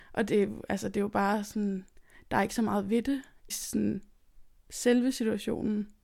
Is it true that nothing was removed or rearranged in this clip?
no; 1 cut; at 3.5 s

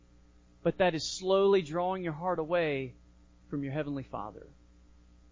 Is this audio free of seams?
yes; 0 cuts

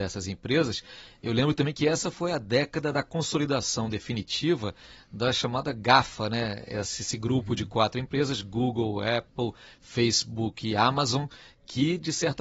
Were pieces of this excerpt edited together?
no; 0 cuts

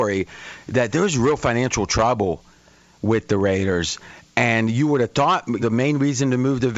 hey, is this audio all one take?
no; 1 cut; at 5.6 s

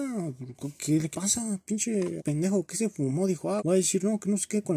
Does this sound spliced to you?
yes; 3 cuts; at 1.1 s, 2.2 s, 3.6 s

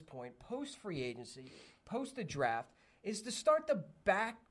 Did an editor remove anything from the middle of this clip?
no; 0 cuts

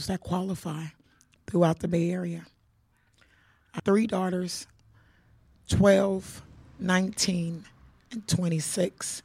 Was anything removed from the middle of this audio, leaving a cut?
yes; 1 cut; at 3.8 s

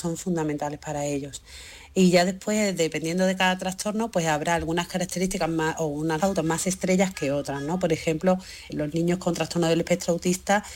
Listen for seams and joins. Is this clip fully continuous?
no; 2 cuts; at 6.2 s, 8.7 s

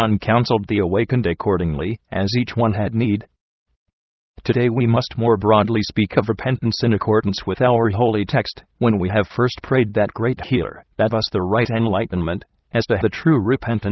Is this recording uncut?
no; 2 cuts; at 11.1 s, 13.0 s

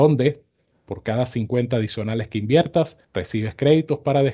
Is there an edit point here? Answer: yes; 1 cut; at 3.0 s

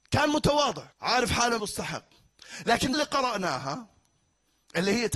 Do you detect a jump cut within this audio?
yes; 3 cuts; at 0.9 s, 1.6 s, 2.9 s

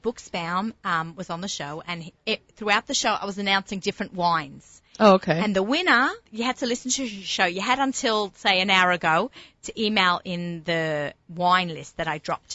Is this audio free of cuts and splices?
no; 1 cut; at 6.3 s

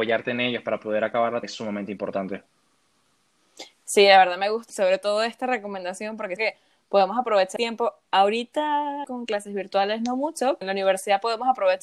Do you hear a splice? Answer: yes; 7 cuts; at 1.4 s, 3.7 s, 4.7 s, 6.4 s, 7.6 s, 9.0 s, 10.6 s

